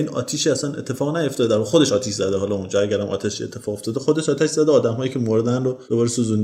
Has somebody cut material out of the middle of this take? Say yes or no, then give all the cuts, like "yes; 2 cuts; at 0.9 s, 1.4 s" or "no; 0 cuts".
no; 0 cuts